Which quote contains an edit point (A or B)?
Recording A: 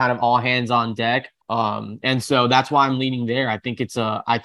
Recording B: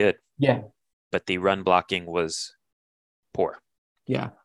A